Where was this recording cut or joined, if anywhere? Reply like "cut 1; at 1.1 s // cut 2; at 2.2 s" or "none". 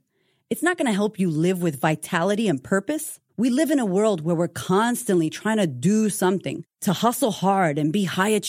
cut 1; at 3.3 s // cut 2; at 6.7 s